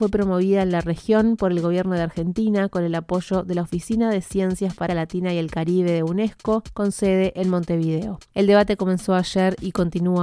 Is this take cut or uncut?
cut